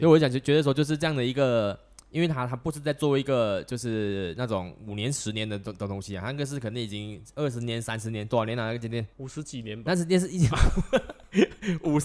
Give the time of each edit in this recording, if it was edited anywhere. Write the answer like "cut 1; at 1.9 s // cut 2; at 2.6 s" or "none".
cut 1; at 9.1 s